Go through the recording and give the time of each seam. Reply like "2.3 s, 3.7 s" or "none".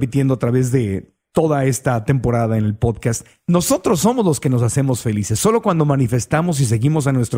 none